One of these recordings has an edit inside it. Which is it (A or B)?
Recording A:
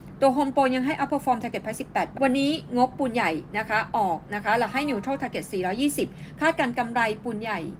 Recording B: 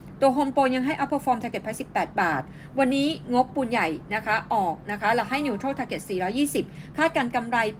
A